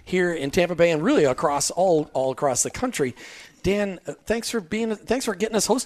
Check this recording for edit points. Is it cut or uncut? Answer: uncut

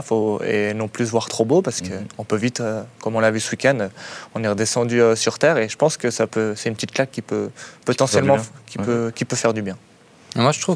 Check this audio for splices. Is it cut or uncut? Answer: uncut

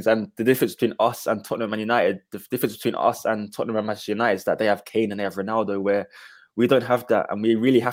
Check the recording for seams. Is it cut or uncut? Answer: uncut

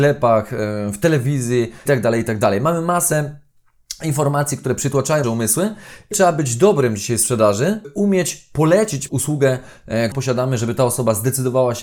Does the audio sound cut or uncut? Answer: cut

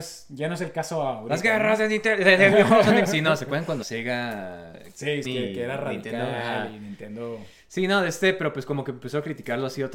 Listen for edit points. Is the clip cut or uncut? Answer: cut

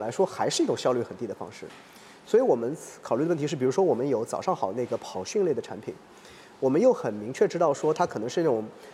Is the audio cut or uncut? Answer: uncut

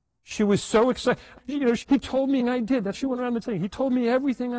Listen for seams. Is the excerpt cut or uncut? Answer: cut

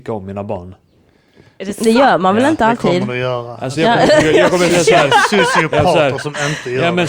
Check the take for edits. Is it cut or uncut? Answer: uncut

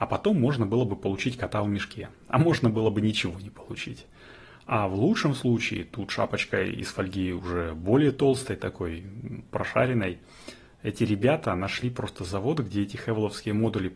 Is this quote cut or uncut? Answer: uncut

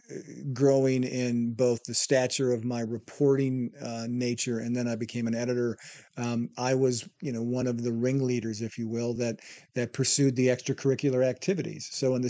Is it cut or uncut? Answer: uncut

